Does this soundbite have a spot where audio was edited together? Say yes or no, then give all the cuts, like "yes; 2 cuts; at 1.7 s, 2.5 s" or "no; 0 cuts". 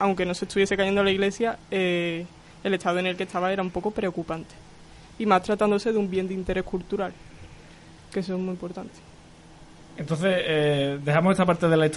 no; 0 cuts